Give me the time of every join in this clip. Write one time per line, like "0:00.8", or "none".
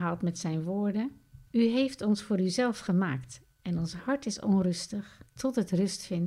0:01.5
0:05.3